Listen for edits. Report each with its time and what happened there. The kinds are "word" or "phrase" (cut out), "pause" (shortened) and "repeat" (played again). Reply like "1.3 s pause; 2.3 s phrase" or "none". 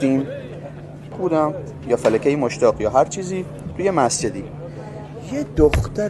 1.1 s phrase